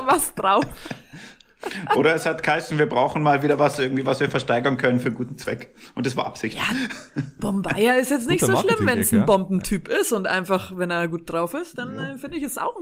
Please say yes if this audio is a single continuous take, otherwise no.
yes